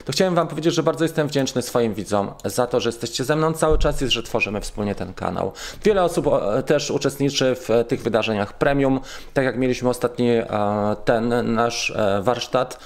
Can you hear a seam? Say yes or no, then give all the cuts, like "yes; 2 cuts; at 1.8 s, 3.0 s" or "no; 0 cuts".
no; 0 cuts